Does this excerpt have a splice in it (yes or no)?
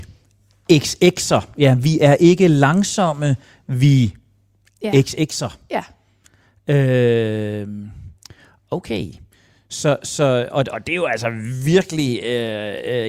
no